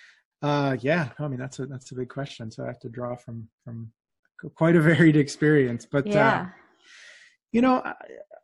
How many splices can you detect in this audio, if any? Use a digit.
0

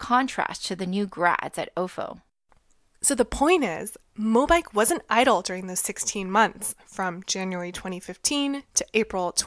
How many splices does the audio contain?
0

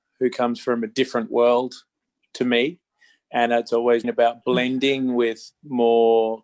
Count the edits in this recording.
1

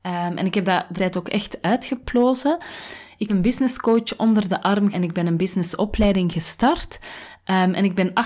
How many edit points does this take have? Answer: 3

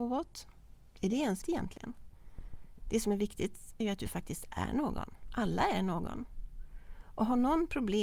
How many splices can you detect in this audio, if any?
2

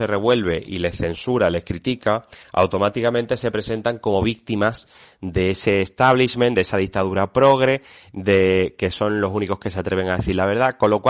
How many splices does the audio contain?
0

